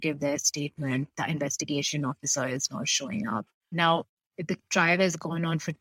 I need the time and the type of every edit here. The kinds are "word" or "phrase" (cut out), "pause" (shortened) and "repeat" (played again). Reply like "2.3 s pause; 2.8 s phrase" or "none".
none